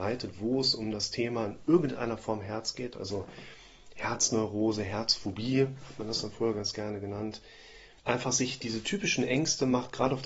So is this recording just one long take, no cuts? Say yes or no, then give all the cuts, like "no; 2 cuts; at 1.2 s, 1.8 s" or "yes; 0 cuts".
no; 1 cut; at 8.0 s